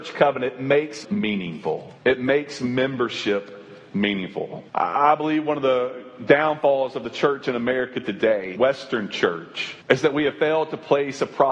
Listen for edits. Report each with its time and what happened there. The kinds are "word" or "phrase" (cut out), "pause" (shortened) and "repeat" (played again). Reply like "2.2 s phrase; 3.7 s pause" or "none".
1.0 s word; 2.0 s pause; 4.7 s pause; 8.6 s word; 9.8 s pause